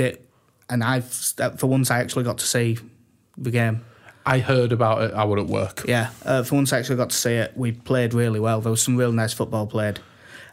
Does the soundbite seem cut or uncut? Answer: uncut